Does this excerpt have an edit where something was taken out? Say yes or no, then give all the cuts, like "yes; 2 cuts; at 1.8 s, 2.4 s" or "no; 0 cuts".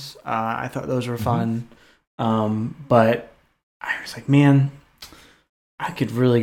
no; 0 cuts